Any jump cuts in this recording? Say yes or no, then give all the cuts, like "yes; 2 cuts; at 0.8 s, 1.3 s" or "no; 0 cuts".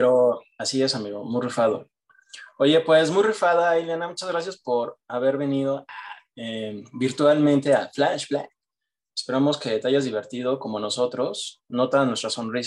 no; 0 cuts